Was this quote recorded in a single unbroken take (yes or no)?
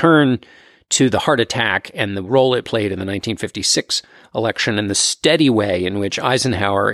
yes